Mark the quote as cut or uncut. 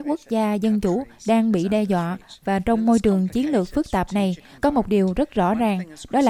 uncut